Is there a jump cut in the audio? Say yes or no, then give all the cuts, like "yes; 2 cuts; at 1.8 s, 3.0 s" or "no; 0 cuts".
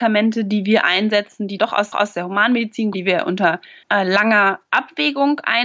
yes; 4 cuts; at 1.6 s, 1.9 s, 2.9 s, 3.8 s